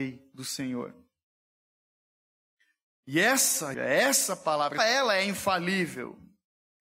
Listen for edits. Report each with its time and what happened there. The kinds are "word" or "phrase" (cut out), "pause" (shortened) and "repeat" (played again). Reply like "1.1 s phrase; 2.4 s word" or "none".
3.7 s word; 4.8 s word